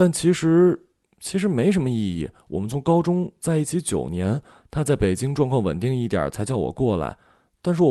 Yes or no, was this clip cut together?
no